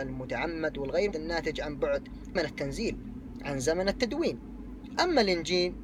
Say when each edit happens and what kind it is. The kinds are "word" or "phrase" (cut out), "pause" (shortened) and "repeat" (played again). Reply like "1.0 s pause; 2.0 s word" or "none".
1.1 s word; 2.4 s word